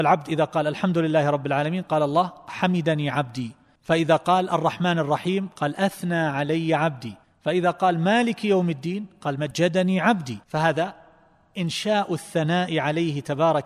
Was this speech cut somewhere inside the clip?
yes; 2 cuts; at 7.2 s, 10.4 s

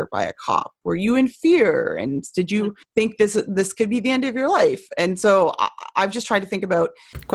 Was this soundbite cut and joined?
yes; 1 cut; at 2.8 s

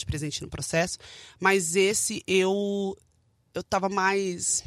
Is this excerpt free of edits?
yes; 0 cuts

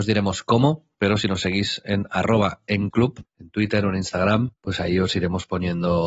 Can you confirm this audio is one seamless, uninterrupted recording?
no; 4 cuts; at 0.9 s, 2.9 s, 3.3 s, 4.6 s

